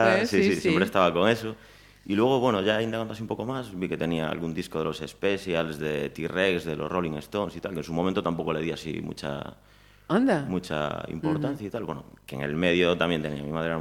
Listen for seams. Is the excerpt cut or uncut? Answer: uncut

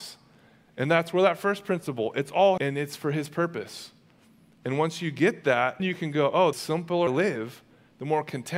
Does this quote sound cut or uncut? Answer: cut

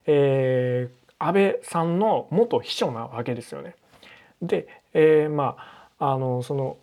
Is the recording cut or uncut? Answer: uncut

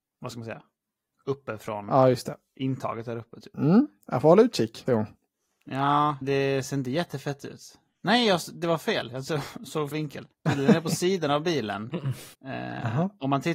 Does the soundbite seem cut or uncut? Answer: cut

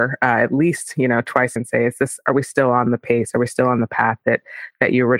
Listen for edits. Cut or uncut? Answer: cut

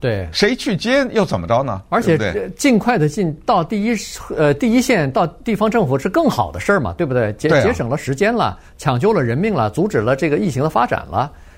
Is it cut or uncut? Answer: uncut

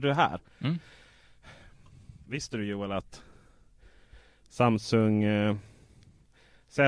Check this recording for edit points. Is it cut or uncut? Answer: uncut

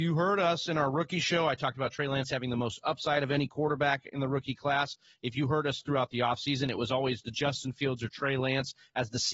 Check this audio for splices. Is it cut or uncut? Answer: uncut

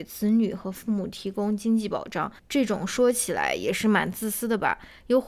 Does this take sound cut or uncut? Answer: cut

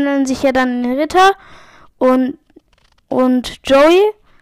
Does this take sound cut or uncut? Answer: uncut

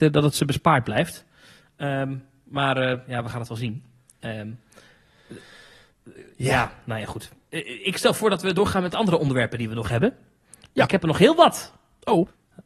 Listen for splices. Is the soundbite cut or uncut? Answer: uncut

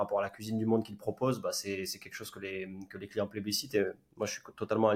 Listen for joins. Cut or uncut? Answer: uncut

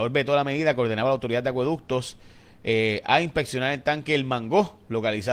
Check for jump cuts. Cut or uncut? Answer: uncut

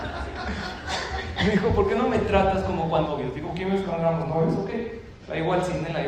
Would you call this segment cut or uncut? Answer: cut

